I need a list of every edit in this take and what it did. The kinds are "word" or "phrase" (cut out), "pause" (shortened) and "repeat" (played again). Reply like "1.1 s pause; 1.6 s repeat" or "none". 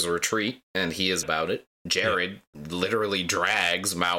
1.2 s word; 1.7 s pause